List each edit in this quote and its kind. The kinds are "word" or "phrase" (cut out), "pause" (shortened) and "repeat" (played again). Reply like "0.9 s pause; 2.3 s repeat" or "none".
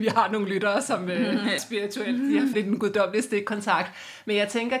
1.6 s word; 2.5 s word